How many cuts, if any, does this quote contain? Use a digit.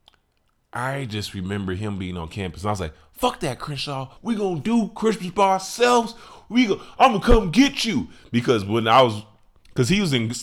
1